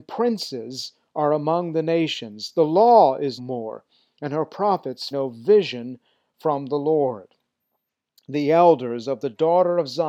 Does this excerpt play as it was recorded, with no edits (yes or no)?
no